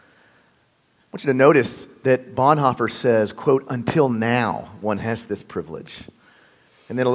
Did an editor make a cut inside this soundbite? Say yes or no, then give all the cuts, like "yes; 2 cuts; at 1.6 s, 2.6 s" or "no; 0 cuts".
no; 0 cuts